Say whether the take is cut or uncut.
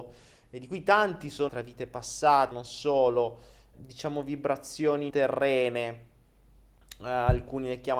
cut